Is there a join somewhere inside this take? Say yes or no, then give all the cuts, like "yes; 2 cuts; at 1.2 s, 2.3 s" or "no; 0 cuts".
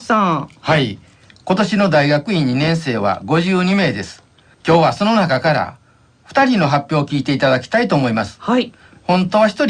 no; 0 cuts